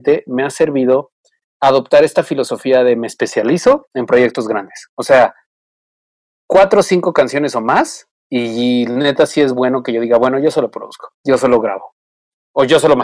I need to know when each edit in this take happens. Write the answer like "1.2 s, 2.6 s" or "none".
8.1 s, 11.2 s